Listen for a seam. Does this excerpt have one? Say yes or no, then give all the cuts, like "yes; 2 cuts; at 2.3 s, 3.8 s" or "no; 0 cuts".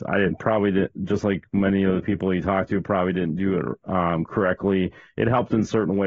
no; 0 cuts